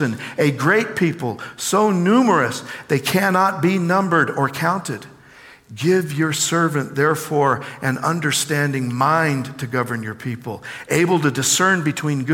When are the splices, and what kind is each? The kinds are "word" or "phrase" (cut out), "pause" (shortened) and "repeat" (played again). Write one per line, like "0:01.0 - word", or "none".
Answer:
none